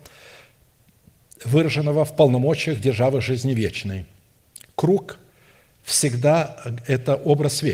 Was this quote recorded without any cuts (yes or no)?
yes